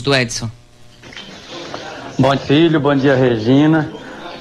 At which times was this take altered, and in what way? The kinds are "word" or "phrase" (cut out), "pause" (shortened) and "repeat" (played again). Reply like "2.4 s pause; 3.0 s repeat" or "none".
2.4 s phrase